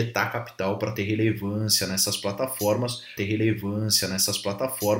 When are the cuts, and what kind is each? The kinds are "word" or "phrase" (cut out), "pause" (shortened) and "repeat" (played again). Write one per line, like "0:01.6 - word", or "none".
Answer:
0:03.2 - repeat